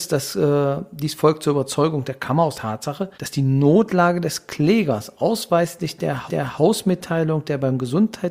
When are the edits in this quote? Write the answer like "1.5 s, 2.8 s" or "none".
2.5 s, 3.1 s, 6.3 s